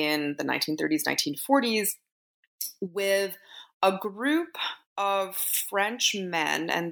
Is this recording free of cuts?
yes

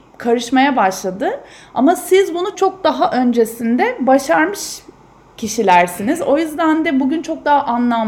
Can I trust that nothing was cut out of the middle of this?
no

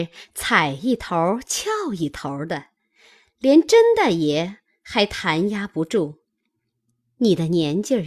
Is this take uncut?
yes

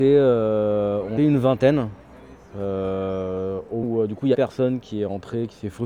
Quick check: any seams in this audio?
yes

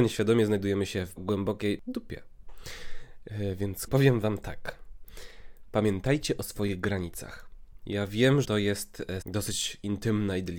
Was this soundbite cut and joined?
yes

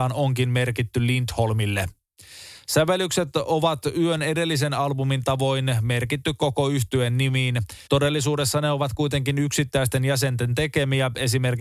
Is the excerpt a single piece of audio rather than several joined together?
no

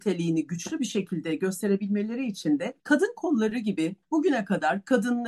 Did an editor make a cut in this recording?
yes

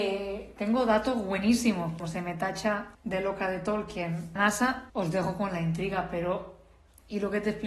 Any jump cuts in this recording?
yes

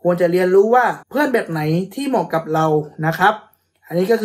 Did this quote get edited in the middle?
yes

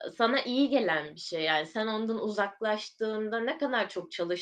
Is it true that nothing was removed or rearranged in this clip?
yes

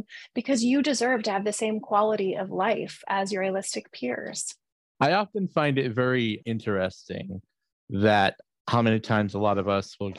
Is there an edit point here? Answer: yes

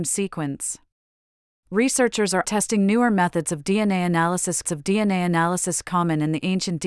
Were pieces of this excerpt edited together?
yes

